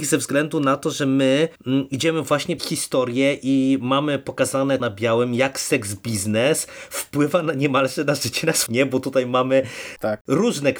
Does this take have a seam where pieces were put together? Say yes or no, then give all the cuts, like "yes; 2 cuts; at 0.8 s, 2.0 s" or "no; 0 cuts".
yes; 4 cuts; at 1.6 s, 2.6 s, 4.8 s, 8.7 s